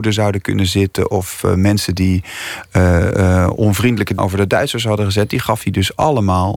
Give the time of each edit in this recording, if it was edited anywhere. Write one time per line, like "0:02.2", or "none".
0:04.2